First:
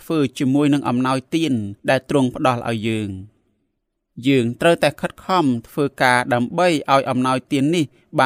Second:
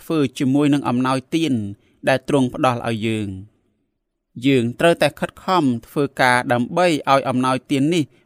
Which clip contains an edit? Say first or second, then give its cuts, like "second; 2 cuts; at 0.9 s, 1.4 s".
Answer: first; 1 cut; at 1.8 s